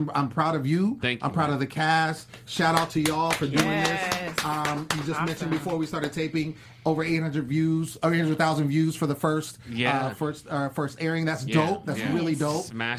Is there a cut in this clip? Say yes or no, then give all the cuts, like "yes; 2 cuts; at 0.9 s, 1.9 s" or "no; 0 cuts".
no; 0 cuts